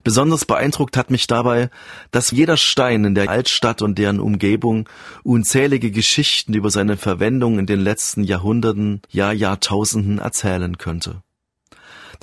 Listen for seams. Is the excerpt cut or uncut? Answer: cut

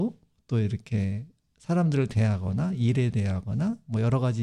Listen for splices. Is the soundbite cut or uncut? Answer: uncut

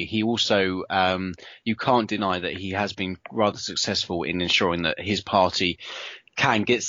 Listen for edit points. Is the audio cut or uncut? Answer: uncut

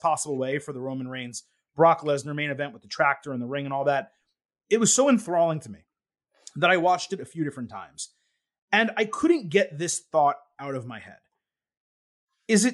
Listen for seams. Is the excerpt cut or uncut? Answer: uncut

